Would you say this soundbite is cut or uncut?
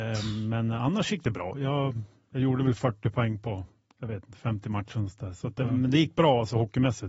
uncut